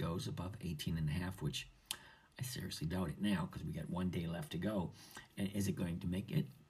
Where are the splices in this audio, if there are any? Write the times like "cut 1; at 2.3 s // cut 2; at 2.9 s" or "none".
none